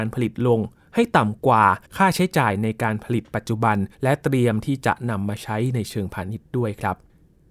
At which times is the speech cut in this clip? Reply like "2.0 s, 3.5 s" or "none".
1.8 s, 3.9 s